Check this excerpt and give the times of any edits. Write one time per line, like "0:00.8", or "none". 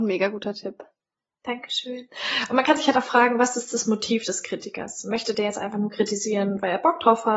none

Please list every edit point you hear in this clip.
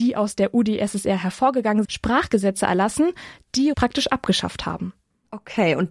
0:01.8
0:03.7

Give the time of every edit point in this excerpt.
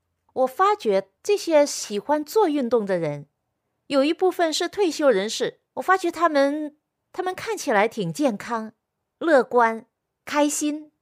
0:01.2
0:05.7

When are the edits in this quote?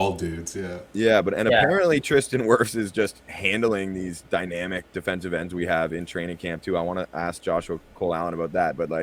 none

